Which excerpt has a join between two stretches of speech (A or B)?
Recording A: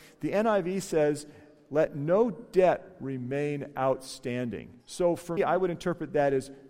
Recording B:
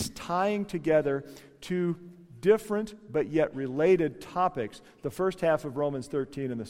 A